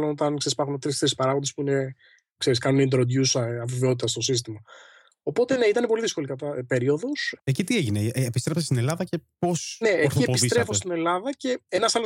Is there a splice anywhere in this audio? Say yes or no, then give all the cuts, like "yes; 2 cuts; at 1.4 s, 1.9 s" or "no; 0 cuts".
no; 0 cuts